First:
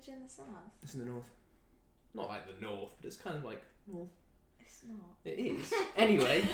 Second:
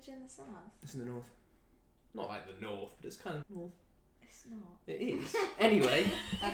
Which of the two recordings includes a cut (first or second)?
second